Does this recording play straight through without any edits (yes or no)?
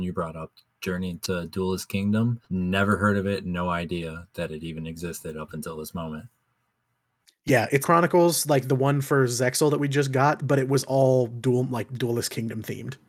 no